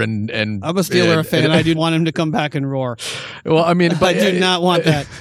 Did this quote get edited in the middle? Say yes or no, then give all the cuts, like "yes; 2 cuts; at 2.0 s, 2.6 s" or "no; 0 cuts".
yes; 1 cut; at 1.7 s